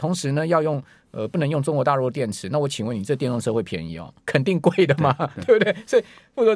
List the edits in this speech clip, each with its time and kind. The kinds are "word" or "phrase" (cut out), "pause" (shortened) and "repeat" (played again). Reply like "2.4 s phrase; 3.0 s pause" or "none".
4.2 s pause